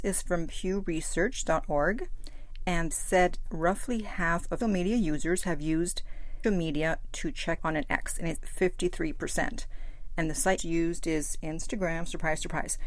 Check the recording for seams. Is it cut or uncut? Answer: cut